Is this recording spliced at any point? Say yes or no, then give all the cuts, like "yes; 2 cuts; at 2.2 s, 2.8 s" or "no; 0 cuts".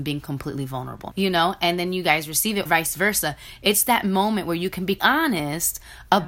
yes; 3 cuts; at 1.1 s, 2.7 s, 5.0 s